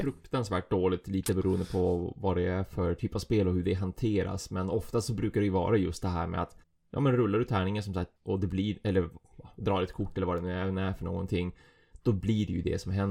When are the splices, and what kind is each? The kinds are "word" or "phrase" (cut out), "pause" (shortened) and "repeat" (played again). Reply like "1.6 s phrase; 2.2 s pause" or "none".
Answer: 6.6 s pause; 8.2 s pause